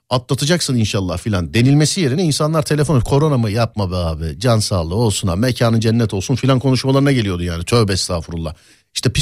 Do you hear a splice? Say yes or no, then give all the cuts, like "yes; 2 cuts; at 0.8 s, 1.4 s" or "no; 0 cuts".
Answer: no; 0 cuts